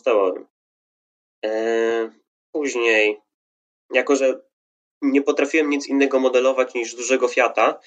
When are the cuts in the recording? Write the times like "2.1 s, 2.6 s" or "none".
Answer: none